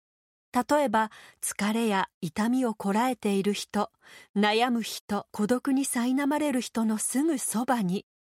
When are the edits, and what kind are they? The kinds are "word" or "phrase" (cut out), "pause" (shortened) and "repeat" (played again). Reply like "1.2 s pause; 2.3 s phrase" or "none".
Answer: 5.3 s pause

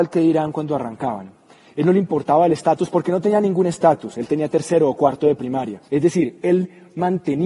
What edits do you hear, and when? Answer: 5.9 s pause

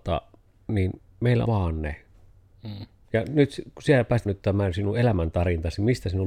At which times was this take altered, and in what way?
1.4 s word; 3.0 s pause; 4.3 s word

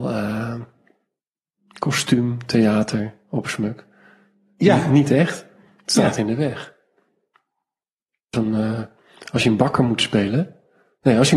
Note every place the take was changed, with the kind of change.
8.3 s word

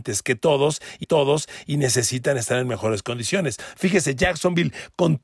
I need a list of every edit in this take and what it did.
1.0 s repeat

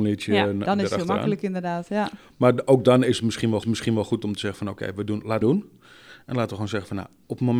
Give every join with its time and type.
3.6 s repeat; 5.4 s phrase

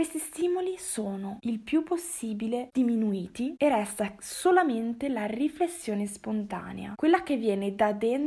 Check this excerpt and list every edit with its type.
none

